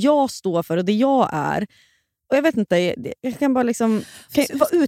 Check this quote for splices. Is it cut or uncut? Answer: uncut